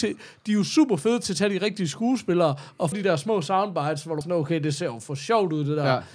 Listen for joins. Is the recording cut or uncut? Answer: cut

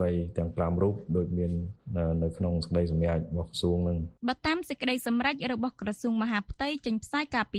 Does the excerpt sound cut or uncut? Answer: cut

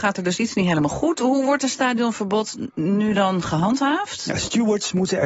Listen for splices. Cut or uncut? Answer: uncut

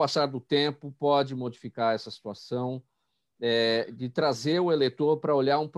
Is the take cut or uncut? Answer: uncut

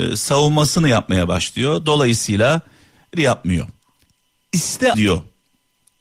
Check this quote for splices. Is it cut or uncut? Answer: cut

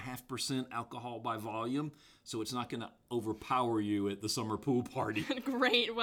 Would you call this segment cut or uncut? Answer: uncut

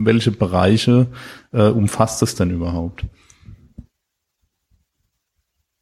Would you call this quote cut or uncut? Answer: uncut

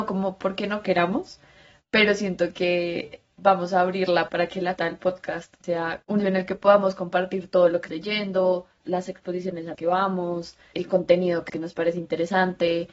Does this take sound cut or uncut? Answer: cut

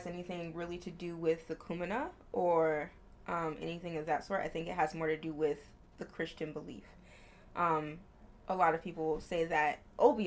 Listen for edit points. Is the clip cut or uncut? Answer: uncut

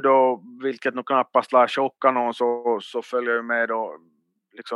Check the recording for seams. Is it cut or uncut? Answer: uncut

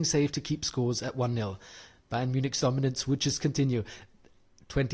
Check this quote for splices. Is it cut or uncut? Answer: uncut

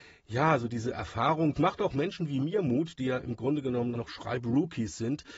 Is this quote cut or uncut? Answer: cut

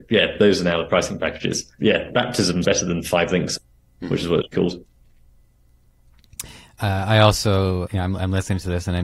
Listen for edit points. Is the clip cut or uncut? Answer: cut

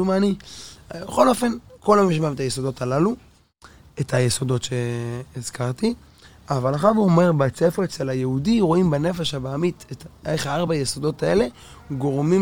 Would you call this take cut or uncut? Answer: uncut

